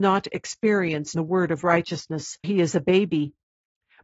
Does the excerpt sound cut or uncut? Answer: cut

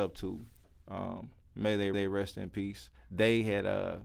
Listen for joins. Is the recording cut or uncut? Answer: cut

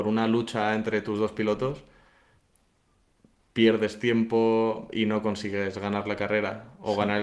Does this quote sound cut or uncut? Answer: uncut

